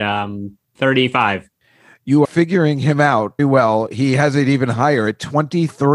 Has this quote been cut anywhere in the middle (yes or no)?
yes